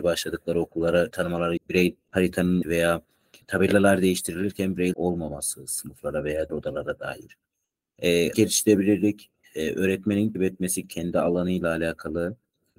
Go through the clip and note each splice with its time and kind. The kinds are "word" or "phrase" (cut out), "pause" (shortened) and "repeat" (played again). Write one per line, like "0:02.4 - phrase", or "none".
0:01.6 - word
0:02.6 - word
0:03.4 - word
0:04.9 - word
0:06.5 - word
0:08.3 - word
0:09.4 - word
0:10.3 - word
0:10.8 - word